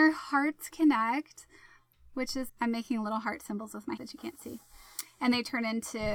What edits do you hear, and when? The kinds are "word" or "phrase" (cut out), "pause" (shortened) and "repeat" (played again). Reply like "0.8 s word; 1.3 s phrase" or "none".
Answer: 2.5 s word; 4.0 s word